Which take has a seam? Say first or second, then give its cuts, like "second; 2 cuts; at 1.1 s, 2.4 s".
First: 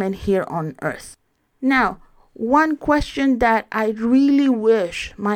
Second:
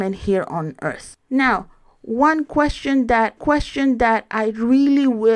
second; 2 cuts; at 1.2 s, 3.4 s